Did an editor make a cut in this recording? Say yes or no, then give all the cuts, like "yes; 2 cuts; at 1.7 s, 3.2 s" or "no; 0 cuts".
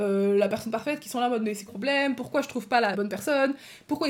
yes; 2 cuts; at 1.7 s, 2.9 s